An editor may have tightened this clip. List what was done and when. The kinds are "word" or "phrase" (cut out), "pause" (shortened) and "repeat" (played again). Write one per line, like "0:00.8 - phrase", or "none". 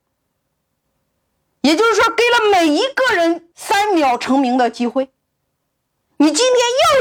0:03.5 - pause